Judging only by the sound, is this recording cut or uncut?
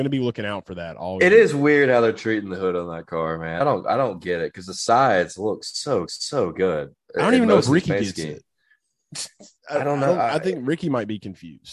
cut